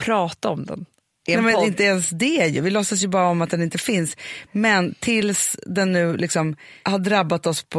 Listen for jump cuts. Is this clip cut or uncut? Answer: uncut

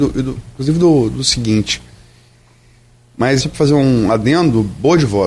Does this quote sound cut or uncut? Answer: cut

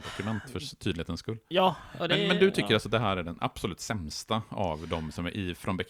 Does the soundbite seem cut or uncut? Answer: uncut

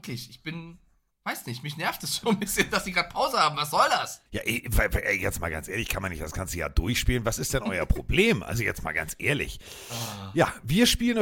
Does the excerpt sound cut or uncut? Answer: cut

